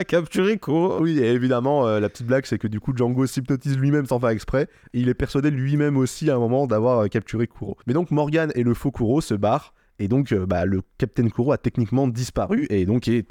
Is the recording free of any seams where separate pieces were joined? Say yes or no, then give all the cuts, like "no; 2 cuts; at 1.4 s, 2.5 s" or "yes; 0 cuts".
yes; 0 cuts